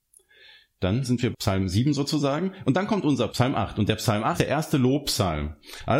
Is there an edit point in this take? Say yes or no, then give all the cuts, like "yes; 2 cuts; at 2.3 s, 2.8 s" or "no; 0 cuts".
yes; 3 cuts; at 1.3 s, 3.3 s, 4.4 s